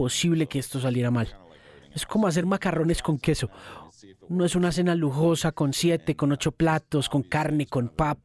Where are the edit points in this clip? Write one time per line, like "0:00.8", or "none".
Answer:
none